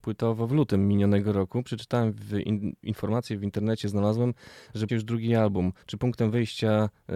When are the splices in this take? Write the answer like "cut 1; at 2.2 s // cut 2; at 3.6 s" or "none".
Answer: cut 1; at 4.9 s // cut 2; at 5.8 s